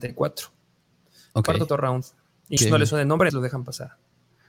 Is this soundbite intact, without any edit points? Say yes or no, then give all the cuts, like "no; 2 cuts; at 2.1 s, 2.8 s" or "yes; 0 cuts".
no; 3 cuts; at 1.7 s, 2.6 s, 3.3 s